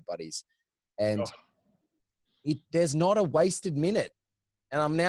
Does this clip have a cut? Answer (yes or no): no